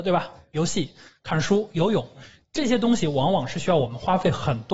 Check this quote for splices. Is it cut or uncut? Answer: uncut